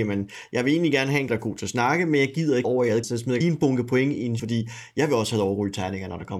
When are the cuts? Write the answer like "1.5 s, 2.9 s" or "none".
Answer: 1.3 s, 2.6 s, 3.0 s, 3.4 s, 4.4 s